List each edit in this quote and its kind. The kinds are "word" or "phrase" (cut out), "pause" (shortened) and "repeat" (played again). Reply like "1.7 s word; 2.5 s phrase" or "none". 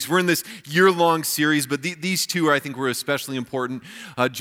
none

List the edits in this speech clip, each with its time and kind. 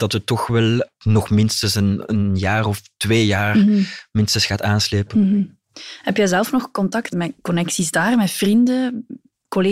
2.0 s word; 7.1 s word

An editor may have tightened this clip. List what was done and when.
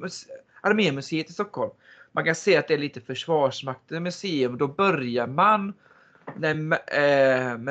none

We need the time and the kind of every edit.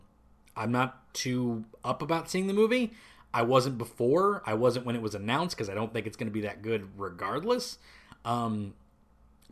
1.1 s pause

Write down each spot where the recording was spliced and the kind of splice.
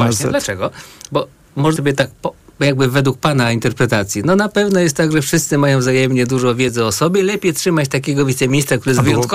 1.8 s word

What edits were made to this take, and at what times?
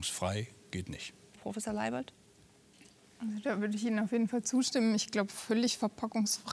1.3 s phrase

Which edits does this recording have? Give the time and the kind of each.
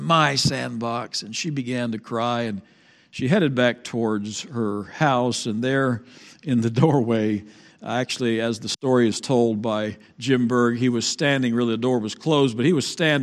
none

